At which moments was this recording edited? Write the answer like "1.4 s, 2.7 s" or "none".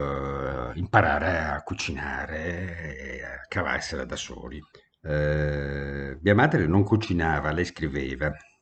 4.7 s